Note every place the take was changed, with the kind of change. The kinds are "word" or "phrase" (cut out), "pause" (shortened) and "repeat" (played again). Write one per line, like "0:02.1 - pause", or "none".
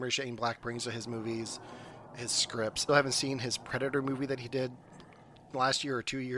0:02.9 - word

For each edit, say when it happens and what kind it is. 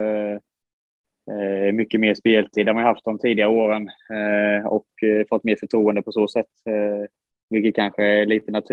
none

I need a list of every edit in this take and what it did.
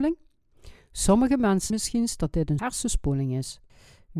0:01.7 - word
0:02.6 - word

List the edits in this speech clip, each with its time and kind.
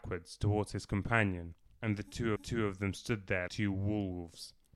0:01.7 - pause
0:02.4 - repeat
0:03.5 - word

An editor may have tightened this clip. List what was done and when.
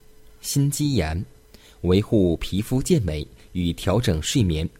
none

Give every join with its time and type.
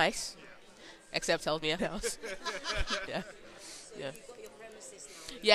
0:01.4 - word
0:01.8 - word
0:03.1 - word

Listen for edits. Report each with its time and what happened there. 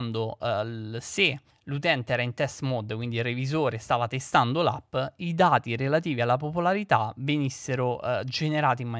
none

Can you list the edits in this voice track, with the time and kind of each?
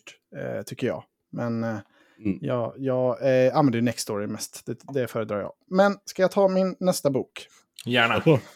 none

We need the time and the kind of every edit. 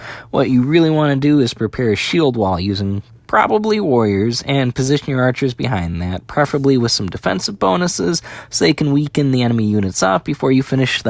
none

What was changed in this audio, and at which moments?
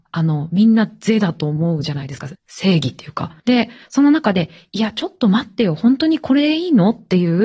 0:02.3 - phrase
0:03.4 - pause

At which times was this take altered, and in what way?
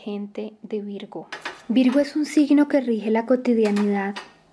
none

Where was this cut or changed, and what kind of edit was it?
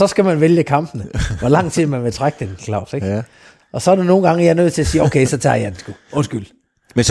none

